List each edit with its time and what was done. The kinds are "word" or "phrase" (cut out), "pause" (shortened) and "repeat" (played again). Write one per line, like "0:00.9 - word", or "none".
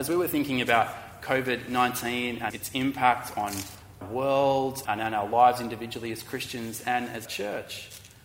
0:02.5 - word
0:04.0 - word
0:04.8 - word
0:07.2 - word